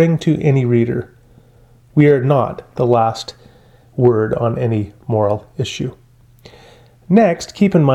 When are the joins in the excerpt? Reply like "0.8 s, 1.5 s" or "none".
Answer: none